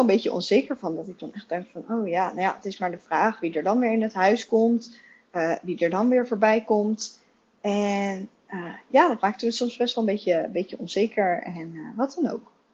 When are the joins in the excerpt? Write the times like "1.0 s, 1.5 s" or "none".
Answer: none